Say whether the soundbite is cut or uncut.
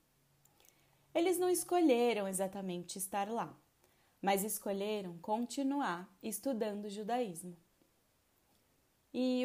uncut